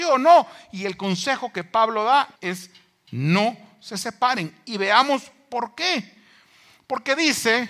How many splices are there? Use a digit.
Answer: 1